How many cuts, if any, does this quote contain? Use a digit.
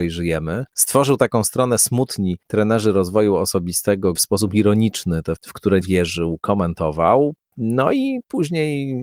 3